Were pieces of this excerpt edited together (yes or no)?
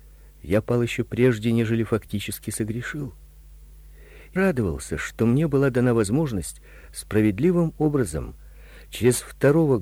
yes